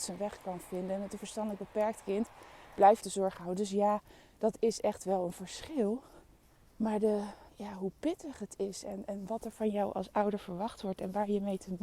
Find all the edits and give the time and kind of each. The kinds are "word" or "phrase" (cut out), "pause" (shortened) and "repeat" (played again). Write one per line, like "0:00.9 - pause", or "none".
0:03.0 - phrase
0:06.5 - pause
0:07.5 - pause